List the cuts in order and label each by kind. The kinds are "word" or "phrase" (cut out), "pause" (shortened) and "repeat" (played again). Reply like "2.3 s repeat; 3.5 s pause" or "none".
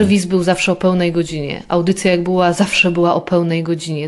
none